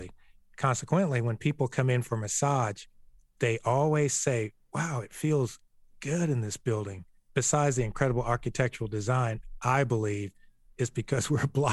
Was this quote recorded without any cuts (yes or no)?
yes